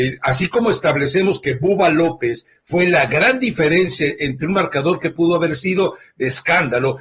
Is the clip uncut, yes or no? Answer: yes